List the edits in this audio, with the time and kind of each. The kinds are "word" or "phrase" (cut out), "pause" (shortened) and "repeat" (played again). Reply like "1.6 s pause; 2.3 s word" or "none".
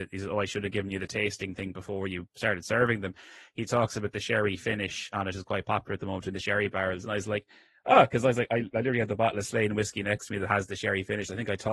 none